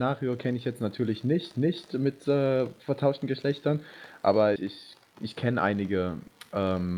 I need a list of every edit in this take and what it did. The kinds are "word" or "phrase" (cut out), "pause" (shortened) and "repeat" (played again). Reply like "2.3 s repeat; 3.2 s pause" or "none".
1.5 s repeat; 4.6 s word